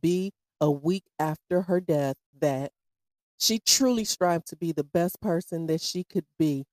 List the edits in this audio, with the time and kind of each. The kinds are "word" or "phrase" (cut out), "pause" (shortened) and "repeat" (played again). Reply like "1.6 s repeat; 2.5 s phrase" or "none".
none